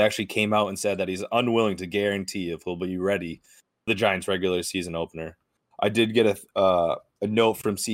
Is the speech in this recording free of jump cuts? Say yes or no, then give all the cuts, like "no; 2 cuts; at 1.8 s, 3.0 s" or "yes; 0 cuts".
yes; 0 cuts